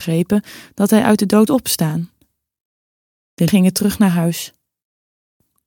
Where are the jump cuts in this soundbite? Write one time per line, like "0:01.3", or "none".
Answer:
0:01.5
0:03.5